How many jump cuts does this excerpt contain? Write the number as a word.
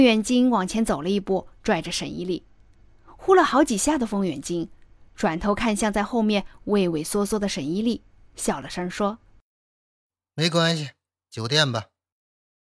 zero